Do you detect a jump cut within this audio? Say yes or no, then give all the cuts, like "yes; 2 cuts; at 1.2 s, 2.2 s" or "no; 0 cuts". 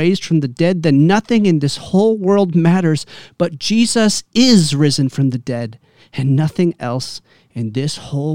no; 0 cuts